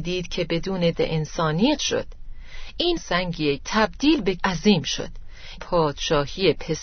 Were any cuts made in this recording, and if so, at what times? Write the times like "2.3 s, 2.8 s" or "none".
0.9 s, 1.8 s, 3.0 s, 3.6 s, 4.4 s, 5.6 s

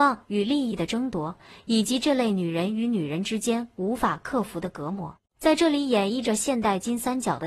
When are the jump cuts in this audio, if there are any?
5.3 s

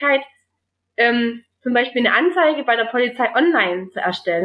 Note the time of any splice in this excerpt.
none

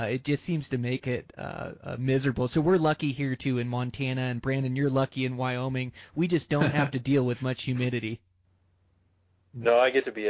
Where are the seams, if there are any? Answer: none

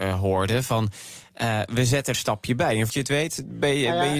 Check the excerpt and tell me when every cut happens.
2.1 s, 2.9 s

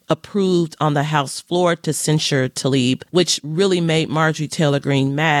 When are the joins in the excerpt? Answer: 3.1 s

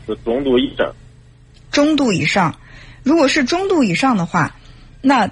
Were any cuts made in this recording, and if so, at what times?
none

